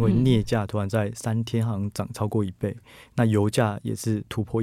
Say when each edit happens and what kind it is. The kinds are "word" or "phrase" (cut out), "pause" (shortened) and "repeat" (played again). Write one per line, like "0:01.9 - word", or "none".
none